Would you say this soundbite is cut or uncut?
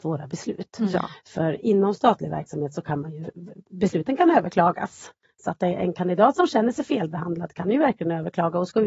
uncut